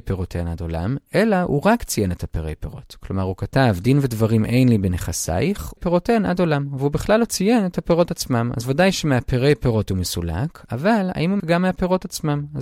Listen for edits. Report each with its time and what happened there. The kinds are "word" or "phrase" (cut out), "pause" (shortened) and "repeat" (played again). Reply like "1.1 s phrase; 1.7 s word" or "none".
5.8 s word; 11.4 s word